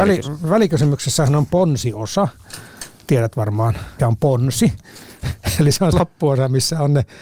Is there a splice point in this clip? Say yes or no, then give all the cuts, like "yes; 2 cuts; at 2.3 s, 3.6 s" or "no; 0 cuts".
yes; 2 cuts; at 4.0 s, 5.9 s